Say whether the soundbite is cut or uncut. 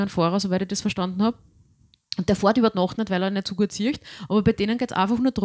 uncut